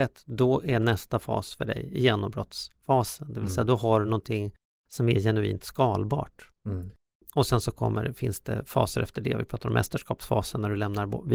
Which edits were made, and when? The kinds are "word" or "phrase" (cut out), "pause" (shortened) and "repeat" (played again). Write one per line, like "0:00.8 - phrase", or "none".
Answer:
none